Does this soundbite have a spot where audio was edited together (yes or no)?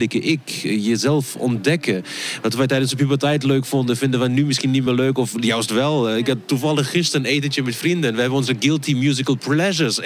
no